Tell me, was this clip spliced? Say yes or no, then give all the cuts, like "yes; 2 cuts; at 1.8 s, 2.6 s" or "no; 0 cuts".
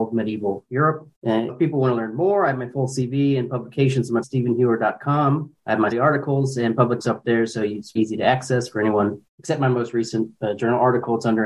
yes; 8 cuts; at 1.1 s, 1.5 s, 4.2 s, 5.6 s, 5.9 s, 7.0 s, 8.0 s, 9.3 s